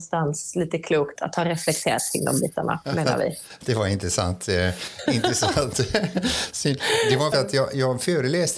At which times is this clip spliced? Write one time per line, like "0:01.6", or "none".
0:01.2
0:07.3